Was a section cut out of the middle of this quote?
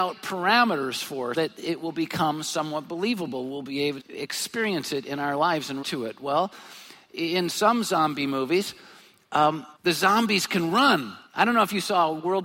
yes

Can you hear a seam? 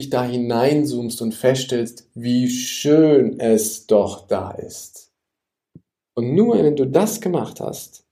no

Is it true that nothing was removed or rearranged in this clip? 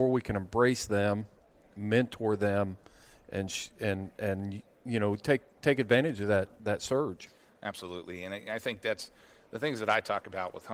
yes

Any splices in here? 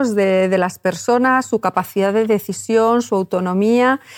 no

